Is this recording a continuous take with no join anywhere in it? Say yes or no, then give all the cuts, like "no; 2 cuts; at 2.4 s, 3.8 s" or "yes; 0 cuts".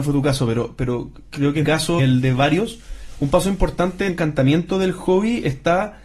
no; 4 cuts; at 1.3 s, 1.6 s, 2.0 s, 4.1 s